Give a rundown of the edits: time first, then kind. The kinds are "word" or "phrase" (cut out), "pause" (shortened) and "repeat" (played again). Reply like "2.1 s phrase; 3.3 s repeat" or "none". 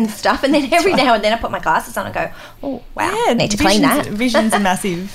3.4 s word

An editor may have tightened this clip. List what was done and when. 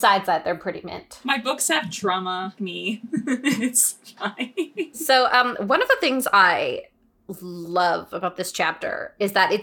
2.6 s word

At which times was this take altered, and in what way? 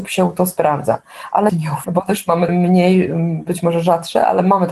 1.5 s word; 1.8 s word; 2.5 s phrase

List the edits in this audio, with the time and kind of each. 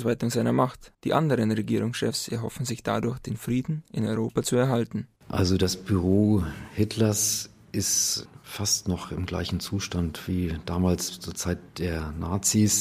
0.9 s pause; 5.2 s pause; 11.7 s pause

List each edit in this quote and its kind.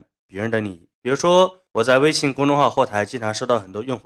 0.9 s pause; 1.7 s pause

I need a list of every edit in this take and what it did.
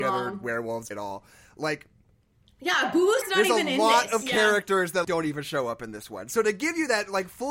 0.9 s word; 3.2 s word; 5.0 s word

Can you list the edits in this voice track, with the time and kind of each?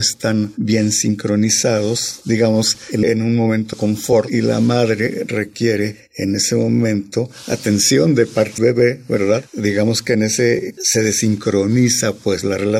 3.0 s phrase; 3.7 s word; 8.6 s word; 10.8 s word

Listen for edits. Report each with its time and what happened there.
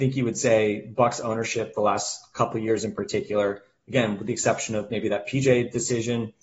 none

